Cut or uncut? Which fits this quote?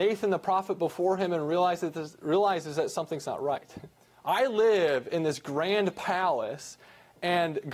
cut